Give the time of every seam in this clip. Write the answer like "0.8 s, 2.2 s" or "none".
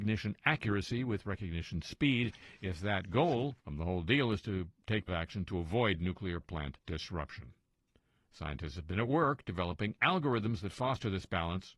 3.6 s, 5.1 s, 6.4 s, 6.8 s